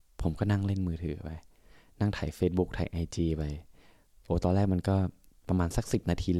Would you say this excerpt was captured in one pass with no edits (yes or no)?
yes